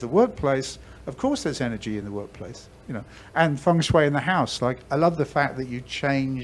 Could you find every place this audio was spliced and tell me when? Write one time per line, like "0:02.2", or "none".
none